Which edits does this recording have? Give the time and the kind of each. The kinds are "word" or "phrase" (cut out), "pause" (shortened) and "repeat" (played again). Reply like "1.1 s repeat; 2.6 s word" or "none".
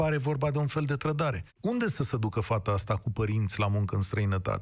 1.5 s pause